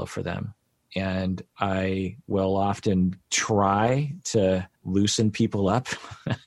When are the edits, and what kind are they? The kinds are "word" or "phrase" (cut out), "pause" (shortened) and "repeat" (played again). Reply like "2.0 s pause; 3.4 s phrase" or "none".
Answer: 1.5 s pause; 4.8 s pause